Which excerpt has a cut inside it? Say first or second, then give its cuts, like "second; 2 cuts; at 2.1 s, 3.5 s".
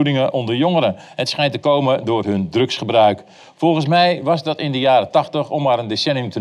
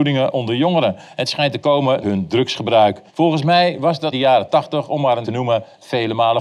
second; 4 cuts; at 2.0 s, 3.1 s, 4.1 s, 5.2 s